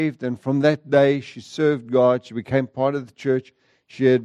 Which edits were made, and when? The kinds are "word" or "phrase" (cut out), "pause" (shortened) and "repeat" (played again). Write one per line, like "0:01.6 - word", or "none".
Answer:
none